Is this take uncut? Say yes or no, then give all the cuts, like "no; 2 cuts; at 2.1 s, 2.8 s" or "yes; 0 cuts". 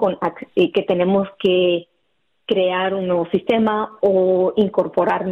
yes; 0 cuts